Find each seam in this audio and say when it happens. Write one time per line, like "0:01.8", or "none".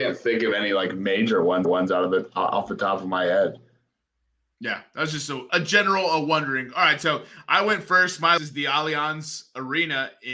0:01.6
0:05.5
0:08.4